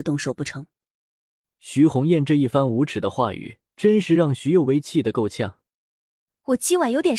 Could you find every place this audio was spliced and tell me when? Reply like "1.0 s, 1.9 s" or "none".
3.7 s